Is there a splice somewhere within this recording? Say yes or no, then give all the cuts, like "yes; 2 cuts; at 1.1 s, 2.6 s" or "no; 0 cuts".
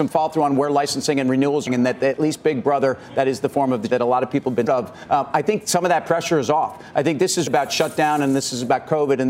yes; 4 cuts; at 1.7 s, 3.9 s, 4.7 s, 7.5 s